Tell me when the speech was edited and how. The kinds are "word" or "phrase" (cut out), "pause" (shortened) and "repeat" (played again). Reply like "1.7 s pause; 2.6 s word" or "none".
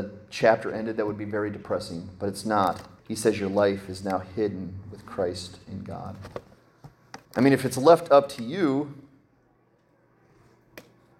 3.0 s pause; 7.2 s pause